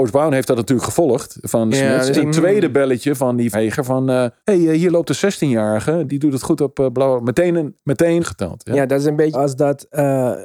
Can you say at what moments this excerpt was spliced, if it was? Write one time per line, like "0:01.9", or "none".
0:01.7
0:02.1
0:03.5
0:04.4
0:06.1
0:08.2
0:09.3